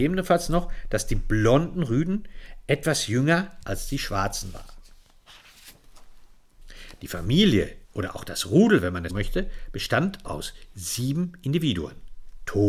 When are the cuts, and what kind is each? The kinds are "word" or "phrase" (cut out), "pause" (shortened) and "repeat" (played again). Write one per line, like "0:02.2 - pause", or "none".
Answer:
0:07.8 - pause
0:09.1 - word
0:10.2 - word